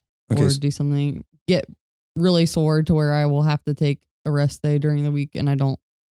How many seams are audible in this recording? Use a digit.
0